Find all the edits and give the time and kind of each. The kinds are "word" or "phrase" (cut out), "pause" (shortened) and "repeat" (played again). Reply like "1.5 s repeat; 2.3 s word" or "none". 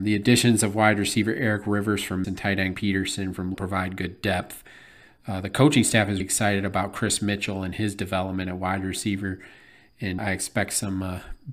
2.2 s word; 2.7 s word; 3.5 s word; 6.2 s word; 10.2 s word

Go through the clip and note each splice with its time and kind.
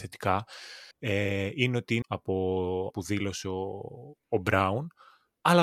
0.9 s pause; 2.0 s word; 2.9 s word; 4.2 s pause

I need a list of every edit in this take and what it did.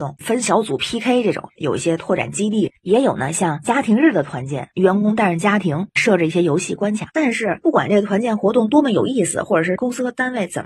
7.1 s pause

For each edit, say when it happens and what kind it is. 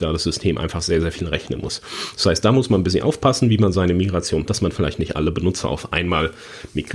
4.5 s word

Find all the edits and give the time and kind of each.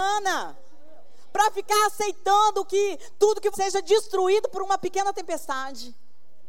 3.5 s phrase

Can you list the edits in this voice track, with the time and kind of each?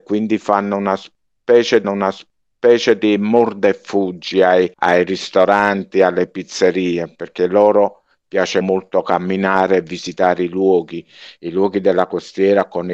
1.8 s repeat; 4.7 s pause; 8.6 s word

